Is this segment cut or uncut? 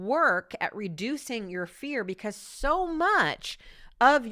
uncut